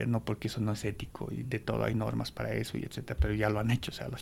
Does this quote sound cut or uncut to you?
uncut